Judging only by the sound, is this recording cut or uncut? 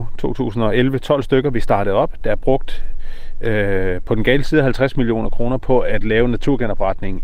uncut